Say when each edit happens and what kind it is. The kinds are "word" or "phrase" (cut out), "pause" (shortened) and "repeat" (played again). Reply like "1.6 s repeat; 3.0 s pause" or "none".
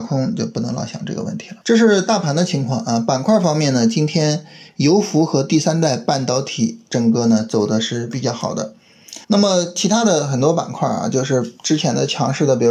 1.6 s pause; 9.2 s pause

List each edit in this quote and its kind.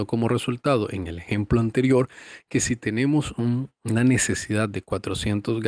none

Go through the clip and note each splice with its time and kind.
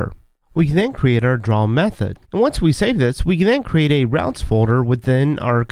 2.2 s pause

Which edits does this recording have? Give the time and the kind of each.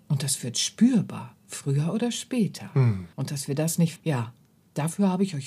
3.1 s pause; 4.0 s word

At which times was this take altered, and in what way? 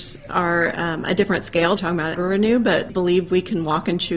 1.8 s phrase; 2.1 s word; 2.9 s word

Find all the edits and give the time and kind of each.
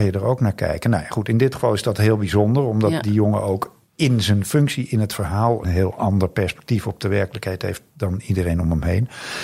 3.9 s pause; 5.6 s word

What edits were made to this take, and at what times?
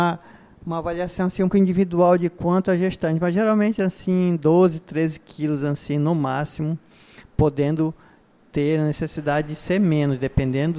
1.5 s word

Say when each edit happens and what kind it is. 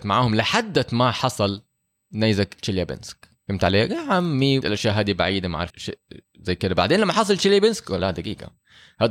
1.9 s pause; 3.4 s pause; 4.6 s word; 5.7 s word; 8.0 s word

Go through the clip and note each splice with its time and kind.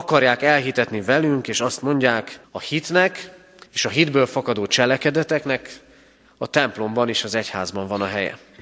2.4 s pause; 3.7 s pause

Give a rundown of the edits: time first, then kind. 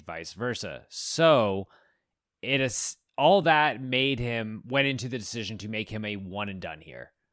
none

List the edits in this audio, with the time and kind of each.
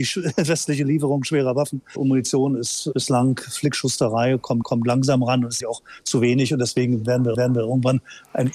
4.6 s repeat; 5.6 s word; 7.3 s repeat

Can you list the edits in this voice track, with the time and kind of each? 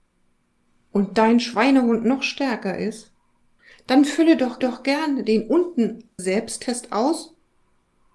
3.6 s pause; 4.6 s repeat; 6.2 s phrase

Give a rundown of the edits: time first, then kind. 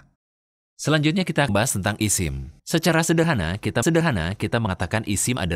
1.5 s word; 2.6 s pause; 3.8 s repeat

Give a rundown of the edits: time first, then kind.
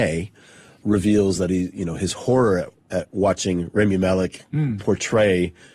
none

